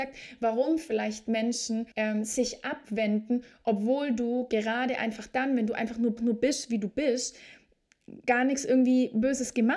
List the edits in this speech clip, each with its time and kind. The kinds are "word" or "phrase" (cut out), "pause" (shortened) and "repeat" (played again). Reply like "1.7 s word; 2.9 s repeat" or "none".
1.9 s pause; 6.2 s repeat

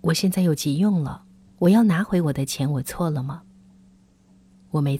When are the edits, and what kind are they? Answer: none

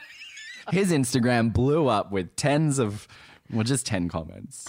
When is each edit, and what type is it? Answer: none

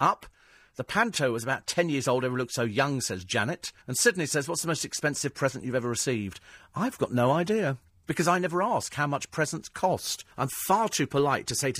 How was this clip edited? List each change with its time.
3.8 s pause; 7.9 s pause; 10.3 s pause

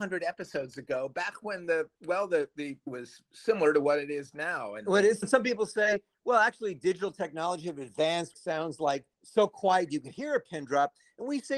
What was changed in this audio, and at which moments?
2.0 s pause; 2.9 s word; 3.3 s pause; 5.2 s word; 8.3 s phrase; 9.1 s pause

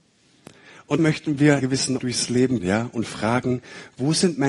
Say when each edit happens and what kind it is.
1.0 s word; 1.6 s word; 2.0 s word; 2.6 s word

